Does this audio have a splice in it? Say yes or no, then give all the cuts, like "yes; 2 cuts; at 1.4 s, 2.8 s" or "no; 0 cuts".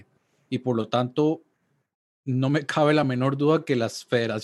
no; 0 cuts